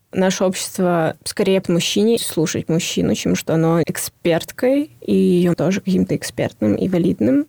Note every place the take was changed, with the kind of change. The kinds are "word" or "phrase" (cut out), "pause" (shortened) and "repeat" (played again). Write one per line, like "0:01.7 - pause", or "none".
0:01.6 - word
0:02.2 - phrase
0:03.4 - phrase
0:03.8 - phrase
0:05.5 - word